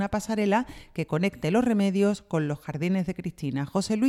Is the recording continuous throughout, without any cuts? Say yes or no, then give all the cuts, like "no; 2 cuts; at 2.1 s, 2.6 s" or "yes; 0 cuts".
yes; 0 cuts